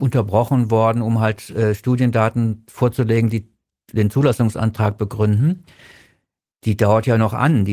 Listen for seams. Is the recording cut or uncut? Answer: uncut